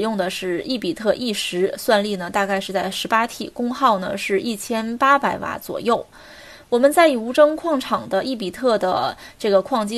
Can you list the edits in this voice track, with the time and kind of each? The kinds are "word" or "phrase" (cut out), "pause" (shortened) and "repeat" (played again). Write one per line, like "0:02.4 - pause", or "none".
none

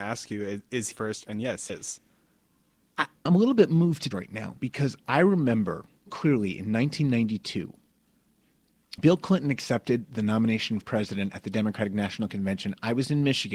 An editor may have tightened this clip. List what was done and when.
0:00.9 - word
0:01.7 - word
0:03.3 - word
0:04.1 - word
0:06.1 - word
0:09.0 - word
0:10.8 - word

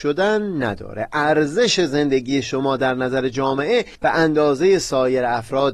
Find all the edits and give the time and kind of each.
0:03.9 - pause

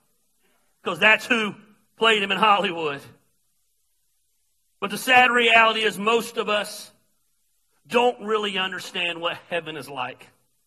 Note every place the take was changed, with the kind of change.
none

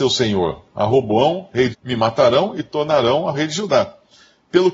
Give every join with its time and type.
0:01.7 - word
0:03.3 - word

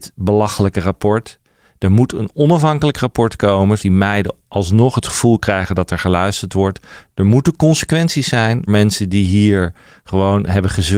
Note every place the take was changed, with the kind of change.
0:03.8 - word
0:08.7 - word

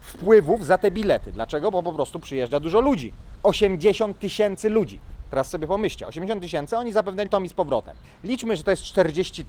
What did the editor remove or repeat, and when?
0:07.3 - word

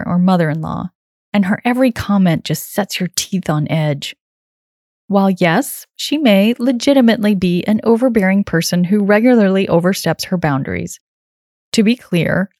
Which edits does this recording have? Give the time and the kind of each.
none

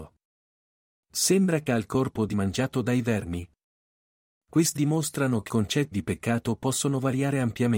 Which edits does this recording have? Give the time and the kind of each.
0:01.7 - word
0:02.3 - word
0:04.8 - word
0:05.5 - word
0:05.9 - word

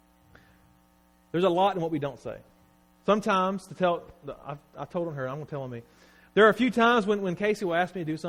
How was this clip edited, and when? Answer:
none

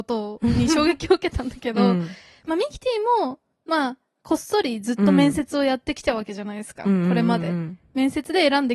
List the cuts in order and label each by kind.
none

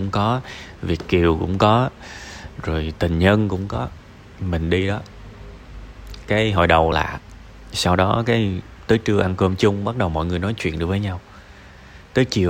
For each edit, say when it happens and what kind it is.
0:06.9 - word

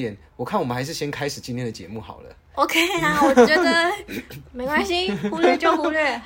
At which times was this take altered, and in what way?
none

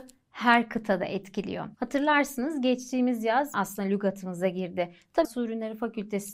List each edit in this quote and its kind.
0:01.7 - pause
0:03.5 - phrase
0:05.2 - word

